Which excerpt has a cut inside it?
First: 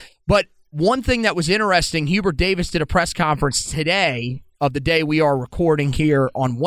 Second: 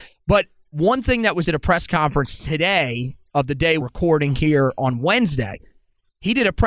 second; 2 cuts; at 1.4 s, 3.8 s

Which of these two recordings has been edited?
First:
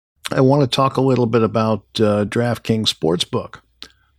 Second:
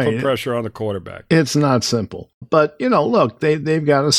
second; 1 cut; at 2.4 s

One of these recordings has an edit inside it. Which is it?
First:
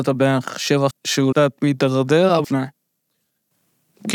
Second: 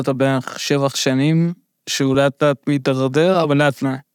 first; 3 cuts; at 0.9 s, 1.3 s, 2.4 s

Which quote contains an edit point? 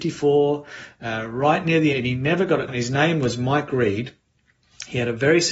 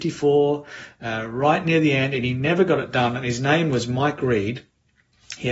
first; 2 cuts; at 1.9 s, 2.7 s

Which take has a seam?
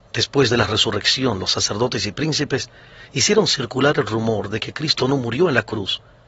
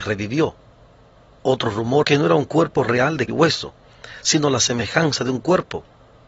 second; 2 cuts; at 2.0 s, 3.3 s

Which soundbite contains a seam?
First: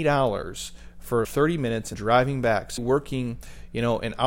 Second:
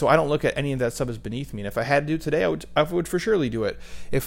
first; 3 cuts; at 1.2 s, 1.9 s, 2.8 s

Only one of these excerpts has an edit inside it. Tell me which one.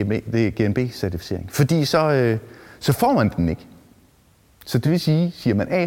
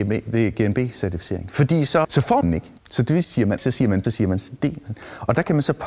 second; 6 cuts; at 2.0 s, 2.4 s, 2.8 s, 3.2 s, 3.6 s, 4.0 s

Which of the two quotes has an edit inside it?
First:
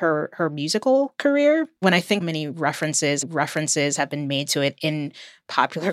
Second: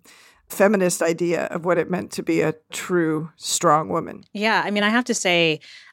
first; 3 cuts; at 1.8 s, 2.2 s, 3.2 s

